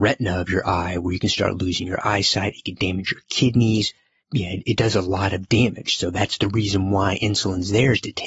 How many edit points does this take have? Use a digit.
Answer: 0